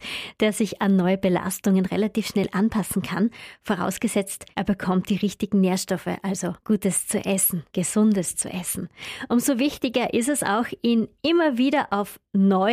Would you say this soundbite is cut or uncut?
cut